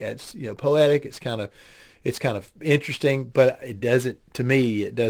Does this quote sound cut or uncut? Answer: uncut